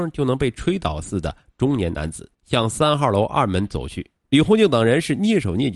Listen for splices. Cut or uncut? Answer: cut